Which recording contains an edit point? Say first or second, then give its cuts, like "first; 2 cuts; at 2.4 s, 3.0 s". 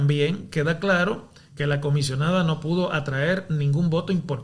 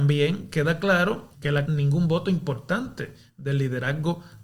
second; 2 cuts; at 1.3 s, 1.7 s